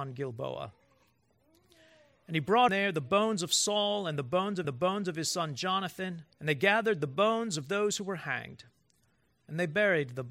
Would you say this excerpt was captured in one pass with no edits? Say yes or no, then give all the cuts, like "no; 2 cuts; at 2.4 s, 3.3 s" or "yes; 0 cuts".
no; 3 cuts; at 2.7 s, 4.6 s, 6.3 s